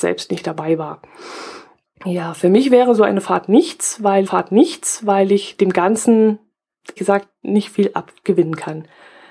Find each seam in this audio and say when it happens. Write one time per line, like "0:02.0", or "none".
0:01.8
0:04.3
0:07.0

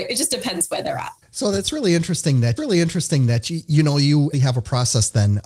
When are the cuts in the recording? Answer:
0:01.2
0:02.6
0:04.3

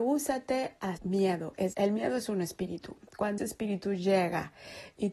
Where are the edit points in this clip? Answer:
0:01.0
0:01.7
0:03.4

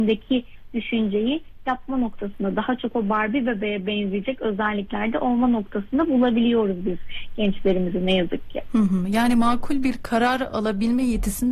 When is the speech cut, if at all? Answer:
none

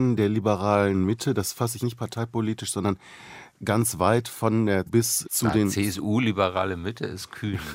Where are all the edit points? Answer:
0:01.8
0:04.9
0:05.2

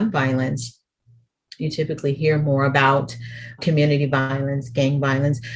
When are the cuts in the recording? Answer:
0:03.6

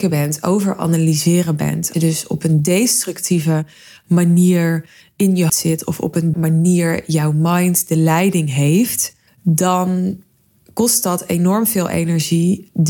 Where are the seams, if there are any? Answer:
0:01.9
0:05.0
0:05.5
0:06.3
0:09.3

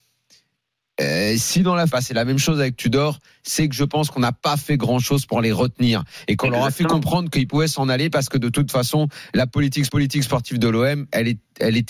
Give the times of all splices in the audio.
0:01.9
0:09.9

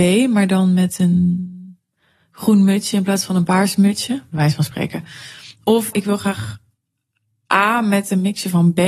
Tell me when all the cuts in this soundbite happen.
0:05.9

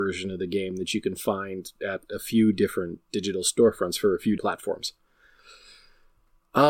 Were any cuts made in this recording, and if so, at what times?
0:04.4

